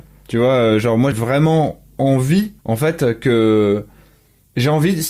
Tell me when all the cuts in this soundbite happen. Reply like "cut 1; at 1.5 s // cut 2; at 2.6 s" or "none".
cut 1; at 1.1 s // cut 2; at 2.6 s